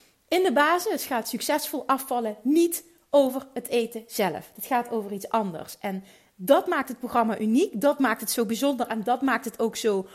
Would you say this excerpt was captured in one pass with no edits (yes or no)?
yes